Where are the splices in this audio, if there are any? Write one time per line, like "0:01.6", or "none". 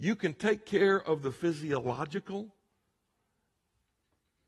none